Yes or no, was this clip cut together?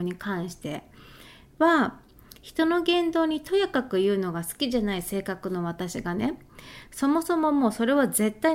no